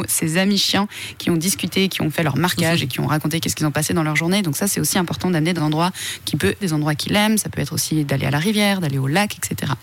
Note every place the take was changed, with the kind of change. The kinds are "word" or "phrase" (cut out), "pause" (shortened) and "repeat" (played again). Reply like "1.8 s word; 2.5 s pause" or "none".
5.6 s word; 6.6 s word